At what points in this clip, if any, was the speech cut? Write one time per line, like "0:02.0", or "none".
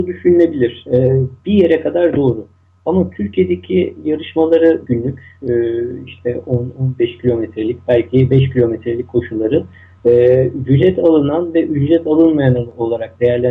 0:01.4
0:04.8